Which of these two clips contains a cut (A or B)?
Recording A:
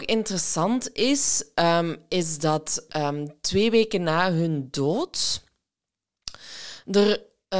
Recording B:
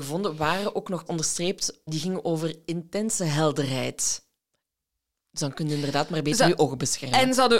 B